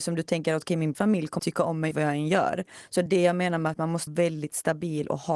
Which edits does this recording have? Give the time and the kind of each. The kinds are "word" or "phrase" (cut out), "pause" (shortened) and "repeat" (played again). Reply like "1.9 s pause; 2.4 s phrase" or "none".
0.9 s word; 1.4 s word; 1.9 s word; 3.1 s word; 4.1 s word